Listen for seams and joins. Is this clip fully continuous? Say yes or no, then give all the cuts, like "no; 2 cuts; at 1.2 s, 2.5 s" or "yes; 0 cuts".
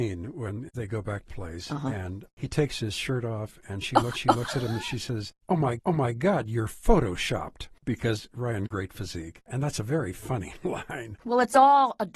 no; 4 cuts; at 1.3 s, 4.1 s, 5.8 s, 8.7 s